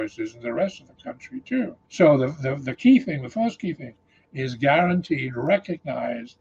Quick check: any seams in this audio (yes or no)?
yes